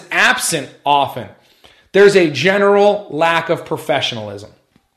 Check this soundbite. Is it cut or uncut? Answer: uncut